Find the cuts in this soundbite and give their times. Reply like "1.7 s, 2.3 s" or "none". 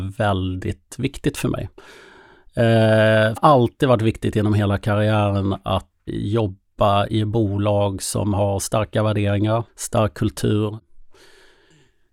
3.4 s, 6.1 s, 9.7 s